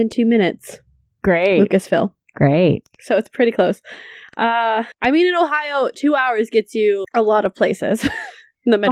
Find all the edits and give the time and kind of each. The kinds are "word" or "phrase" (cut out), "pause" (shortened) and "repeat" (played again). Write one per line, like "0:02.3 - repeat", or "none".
none